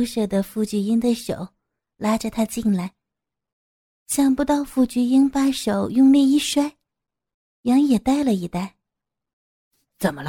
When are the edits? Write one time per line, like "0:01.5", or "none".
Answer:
none